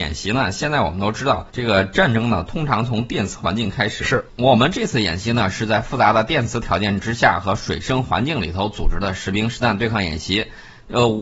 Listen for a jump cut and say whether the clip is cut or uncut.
cut